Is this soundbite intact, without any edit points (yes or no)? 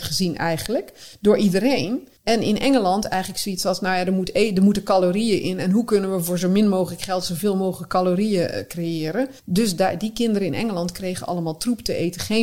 no